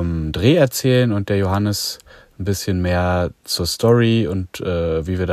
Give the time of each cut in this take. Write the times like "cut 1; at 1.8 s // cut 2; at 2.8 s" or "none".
none

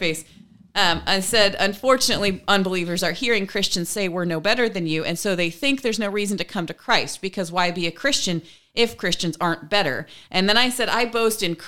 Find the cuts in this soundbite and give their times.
none

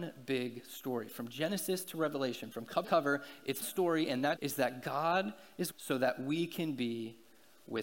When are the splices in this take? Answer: cut 1; at 2.8 s // cut 2; at 3.6 s // cut 3; at 4.4 s // cut 4; at 5.7 s

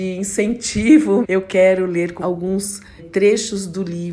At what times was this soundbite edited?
cut 1; at 1.2 s // cut 2; at 2.2 s // cut 3; at 3.0 s

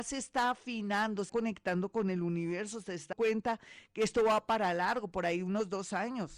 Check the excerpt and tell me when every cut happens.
cut 1; at 1.3 s // cut 2; at 3.1 s

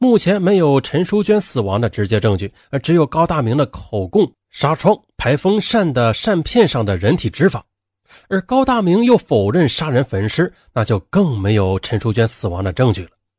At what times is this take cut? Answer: none

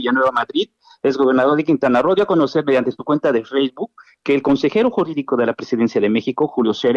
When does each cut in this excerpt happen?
none

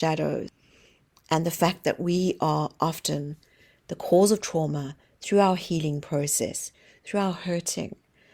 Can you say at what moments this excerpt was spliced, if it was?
none

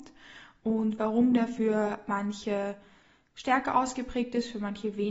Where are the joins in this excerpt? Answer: none

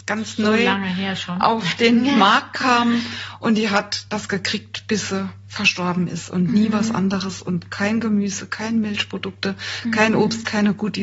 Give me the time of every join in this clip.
none

